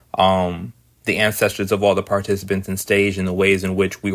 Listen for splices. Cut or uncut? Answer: uncut